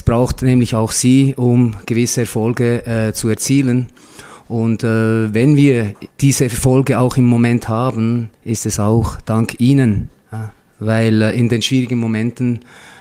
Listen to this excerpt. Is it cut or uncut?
cut